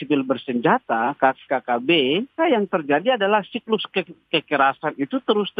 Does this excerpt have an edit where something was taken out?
yes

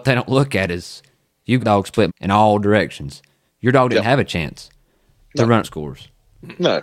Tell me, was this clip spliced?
yes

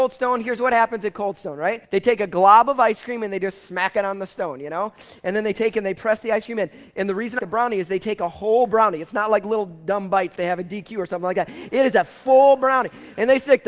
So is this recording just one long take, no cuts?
no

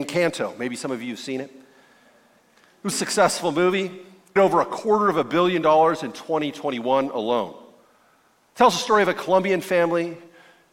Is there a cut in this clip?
yes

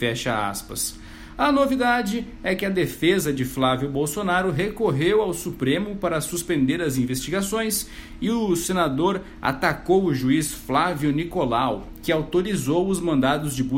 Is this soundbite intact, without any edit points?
yes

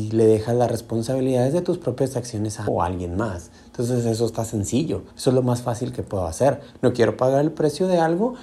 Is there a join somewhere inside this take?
yes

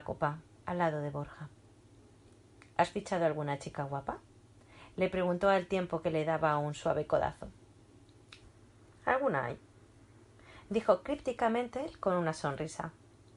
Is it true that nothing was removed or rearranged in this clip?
yes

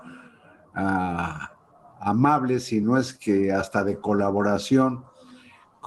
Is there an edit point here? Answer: no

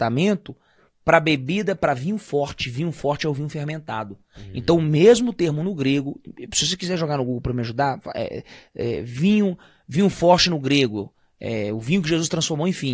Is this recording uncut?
yes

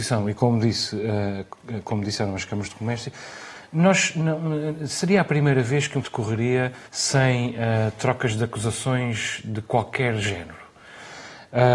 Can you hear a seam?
yes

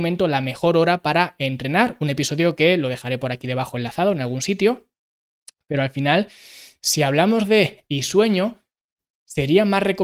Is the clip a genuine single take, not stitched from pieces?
no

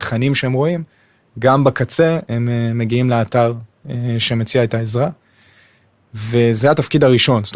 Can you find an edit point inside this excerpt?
no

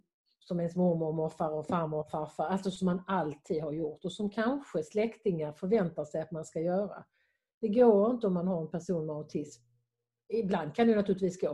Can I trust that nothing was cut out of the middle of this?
yes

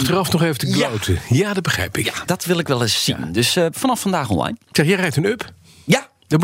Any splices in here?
yes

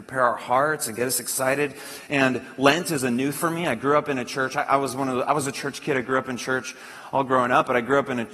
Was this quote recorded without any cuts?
no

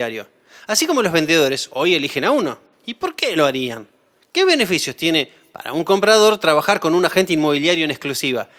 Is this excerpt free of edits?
yes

